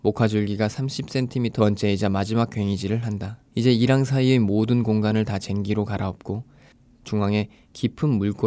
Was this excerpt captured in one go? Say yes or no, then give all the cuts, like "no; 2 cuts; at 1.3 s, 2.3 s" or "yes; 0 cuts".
no; 2 cuts; at 1.6 s, 3.5 s